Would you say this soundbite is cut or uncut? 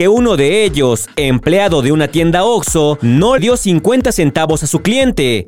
cut